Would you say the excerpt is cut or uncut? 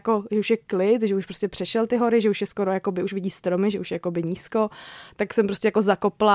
uncut